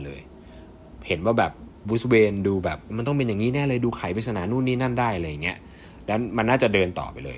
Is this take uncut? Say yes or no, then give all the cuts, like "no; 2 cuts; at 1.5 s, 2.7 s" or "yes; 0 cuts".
no; 1 cut; at 2.9 s